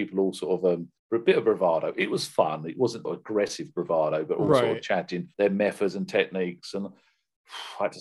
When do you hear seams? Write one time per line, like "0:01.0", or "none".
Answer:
0:01.0
0:03.0
0:05.3